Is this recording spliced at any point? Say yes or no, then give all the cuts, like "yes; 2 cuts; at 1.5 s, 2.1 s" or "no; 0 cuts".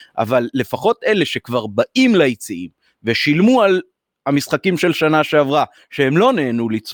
no; 0 cuts